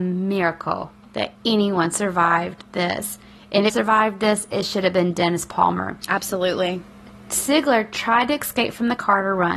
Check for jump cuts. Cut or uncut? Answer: cut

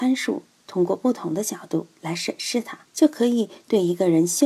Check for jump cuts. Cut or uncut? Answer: cut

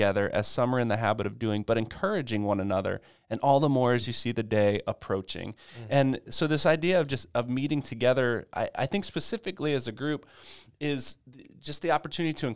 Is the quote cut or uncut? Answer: uncut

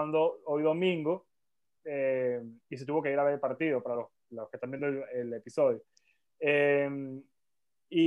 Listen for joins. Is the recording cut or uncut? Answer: uncut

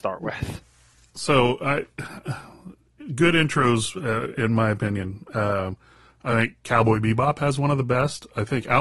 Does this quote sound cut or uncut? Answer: uncut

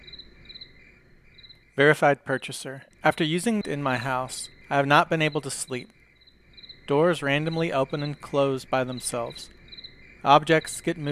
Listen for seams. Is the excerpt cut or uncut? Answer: cut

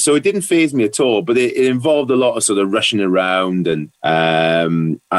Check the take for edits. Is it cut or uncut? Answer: cut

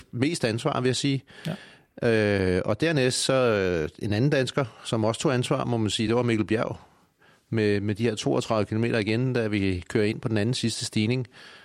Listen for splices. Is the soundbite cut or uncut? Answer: uncut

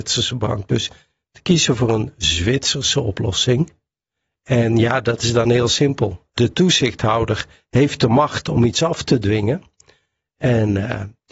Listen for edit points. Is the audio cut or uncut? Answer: uncut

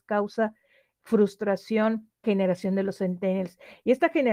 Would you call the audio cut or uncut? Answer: cut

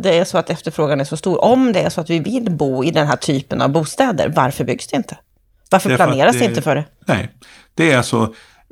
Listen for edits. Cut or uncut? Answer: uncut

